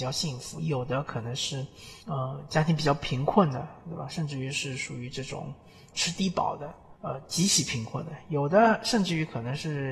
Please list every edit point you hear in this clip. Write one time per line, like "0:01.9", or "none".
0:02.0
0:05.9
0:07.0